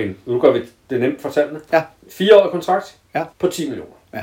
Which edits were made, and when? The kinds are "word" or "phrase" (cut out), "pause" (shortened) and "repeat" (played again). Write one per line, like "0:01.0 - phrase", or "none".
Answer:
0:03.3 - pause